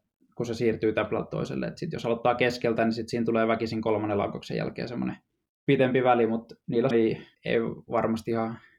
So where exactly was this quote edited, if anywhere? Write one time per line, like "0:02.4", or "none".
0:05.3
0:06.9
0:07.3